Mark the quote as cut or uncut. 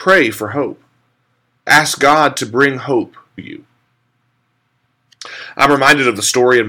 cut